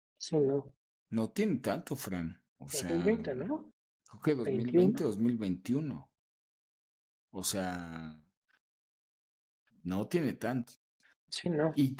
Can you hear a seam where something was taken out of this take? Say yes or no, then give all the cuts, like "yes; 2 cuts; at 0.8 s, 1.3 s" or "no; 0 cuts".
yes; 2 cuts; at 2.5 s, 4.0 s